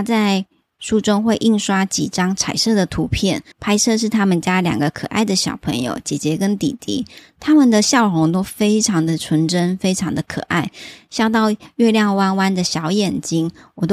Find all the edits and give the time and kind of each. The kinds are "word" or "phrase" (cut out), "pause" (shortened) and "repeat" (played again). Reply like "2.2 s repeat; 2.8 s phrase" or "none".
3.5 s pause